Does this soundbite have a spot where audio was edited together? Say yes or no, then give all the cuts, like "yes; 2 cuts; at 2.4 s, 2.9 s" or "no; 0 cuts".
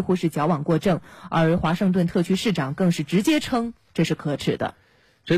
no; 0 cuts